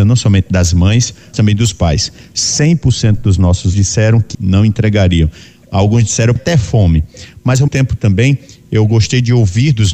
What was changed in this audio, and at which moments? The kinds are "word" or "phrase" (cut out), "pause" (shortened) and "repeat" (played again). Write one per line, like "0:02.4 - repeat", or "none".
0:01.3 - word
0:03.7 - word
0:04.3 - word
0:06.4 - word
0:07.7 - word